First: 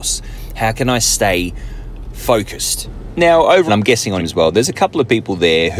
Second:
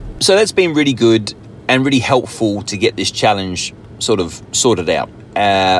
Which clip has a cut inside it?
first; 2 cuts; at 3.7 s, 4.2 s

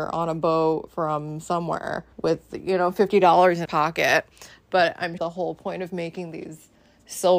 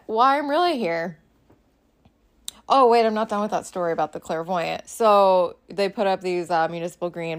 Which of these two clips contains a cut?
first; 3 cuts; at 2.1 s, 3.6 s, 5.2 s

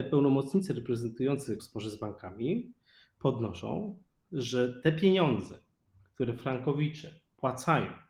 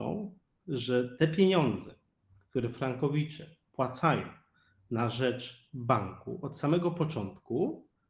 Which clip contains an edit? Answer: first; 1 cut; at 1.6 s

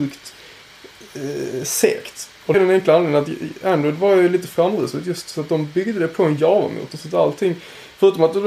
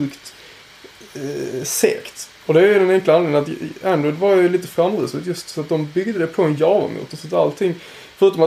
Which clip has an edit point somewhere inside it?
first; 1 cut; at 2.5 s

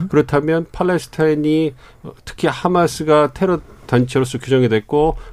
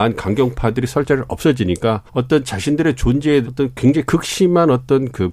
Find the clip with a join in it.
second; 2 cuts; at 2.1 s, 3.4 s

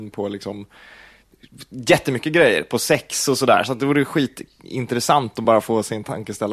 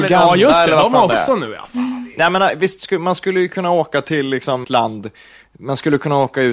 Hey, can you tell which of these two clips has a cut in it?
second; 1 cut; at 4.6 s

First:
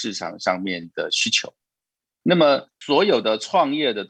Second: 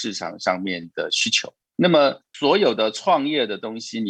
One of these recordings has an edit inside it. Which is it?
second; 1 cut; at 1.6 s

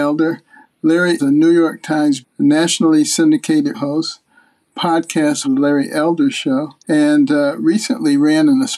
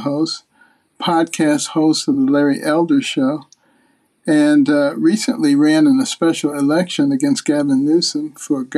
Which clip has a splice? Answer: first; 5 cuts; at 1.2 s, 2.2 s, 3.7 s, 5.4 s, 6.8 s

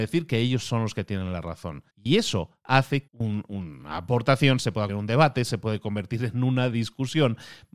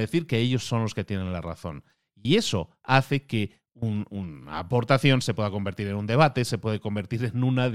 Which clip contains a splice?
first; 3 cuts; at 1.9 s, 3.1 s, 4.9 s

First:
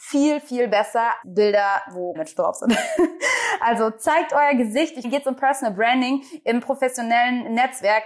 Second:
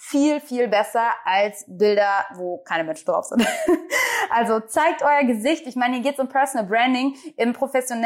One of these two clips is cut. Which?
first; 3 cuts; at 1.2 s, 2.1 s, 5.0 s

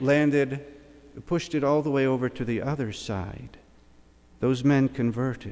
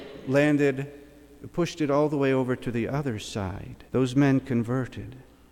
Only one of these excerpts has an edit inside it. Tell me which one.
second; 1 cut; at 3.9 s

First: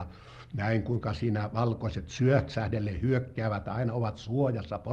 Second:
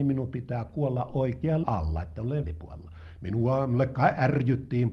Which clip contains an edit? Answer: second; 2 cuts; at 1.6 s, 2.4 s

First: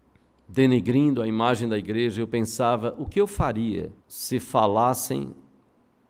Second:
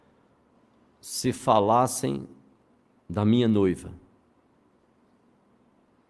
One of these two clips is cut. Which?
first; 1 cut; at 4.0 s

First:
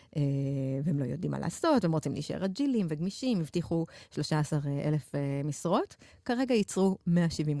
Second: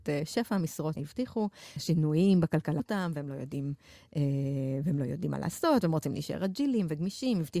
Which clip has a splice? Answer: second; 3 cuts; at 0.9 s, 1.8 s, 2.8 s

